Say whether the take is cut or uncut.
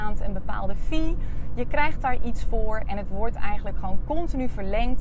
uncut